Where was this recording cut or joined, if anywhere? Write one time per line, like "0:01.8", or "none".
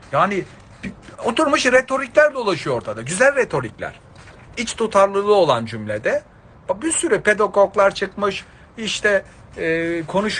none

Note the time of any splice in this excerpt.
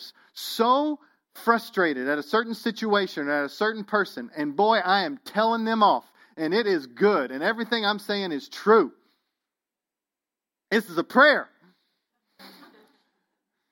none

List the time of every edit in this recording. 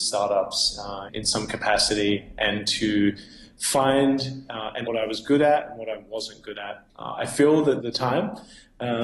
0:01.1
0:04.9
0:06.9
0:07.8

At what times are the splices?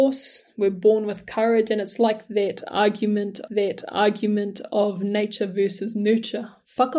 0:03.5

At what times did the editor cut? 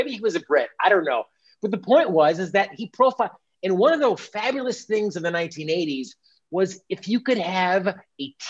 none

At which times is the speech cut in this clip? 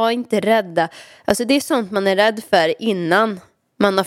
none

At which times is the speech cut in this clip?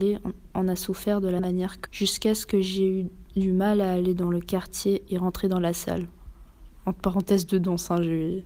0:01.4
0:01.9

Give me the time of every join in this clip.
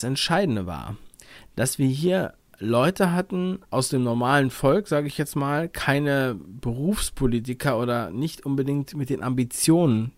0:03.6

